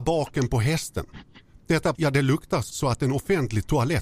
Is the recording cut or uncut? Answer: cut